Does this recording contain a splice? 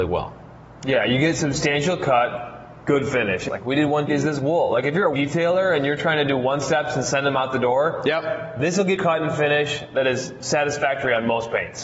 yes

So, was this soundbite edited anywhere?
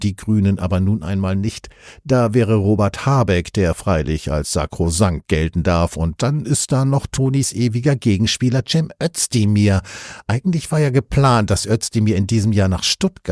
no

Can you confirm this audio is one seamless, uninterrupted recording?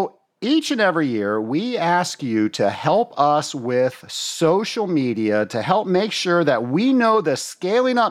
yes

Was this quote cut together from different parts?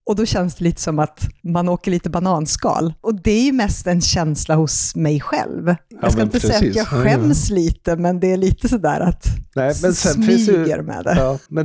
yes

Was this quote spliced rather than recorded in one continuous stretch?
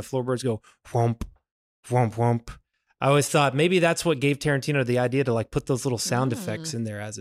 no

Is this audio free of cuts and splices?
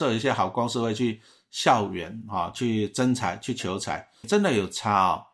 no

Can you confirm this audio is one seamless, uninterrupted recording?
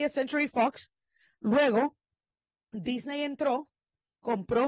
yes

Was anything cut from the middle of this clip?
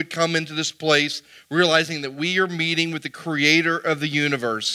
no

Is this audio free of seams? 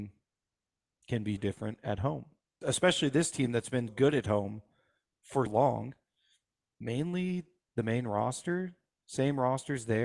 no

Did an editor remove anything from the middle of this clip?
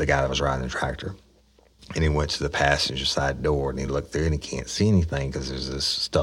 no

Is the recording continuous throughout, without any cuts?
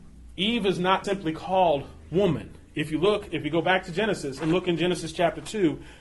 no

